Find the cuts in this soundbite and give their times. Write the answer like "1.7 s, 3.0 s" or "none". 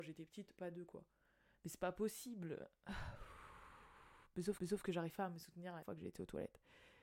4.6 s, 5.8 s